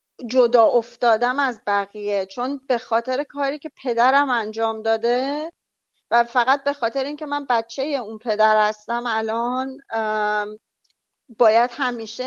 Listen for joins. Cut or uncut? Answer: uncut